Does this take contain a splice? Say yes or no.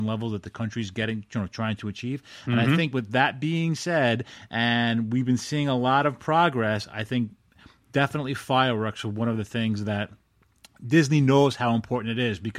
no